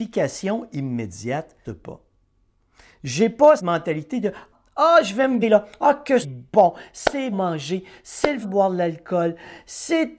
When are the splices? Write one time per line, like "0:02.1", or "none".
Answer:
0:01.6
0:03.6
0:04.5
0:05.4
0:06.2
0:07.3
0:08.4